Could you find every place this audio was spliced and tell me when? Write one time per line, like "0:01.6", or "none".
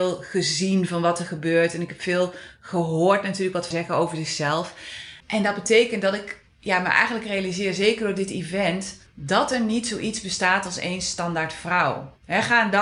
0:03.7
0:05.2
0:09.1